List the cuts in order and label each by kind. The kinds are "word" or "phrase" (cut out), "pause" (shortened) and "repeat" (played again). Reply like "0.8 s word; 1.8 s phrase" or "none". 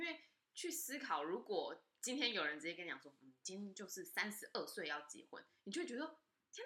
none